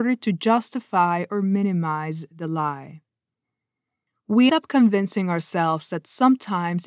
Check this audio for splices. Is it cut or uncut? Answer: cut